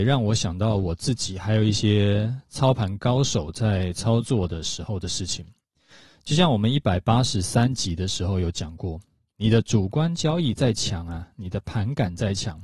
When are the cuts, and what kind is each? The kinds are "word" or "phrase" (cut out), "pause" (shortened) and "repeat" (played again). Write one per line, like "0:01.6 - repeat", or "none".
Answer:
none